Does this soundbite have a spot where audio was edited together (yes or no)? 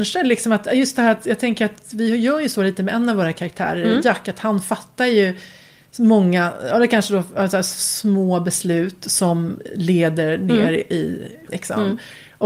yes